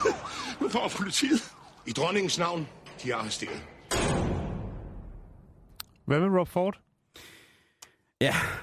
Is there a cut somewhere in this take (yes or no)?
yes